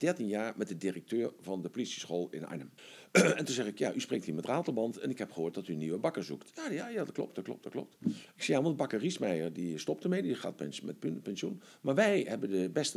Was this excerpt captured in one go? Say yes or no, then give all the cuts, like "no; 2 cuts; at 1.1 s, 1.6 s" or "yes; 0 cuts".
no; 1 cut; at 2.8 s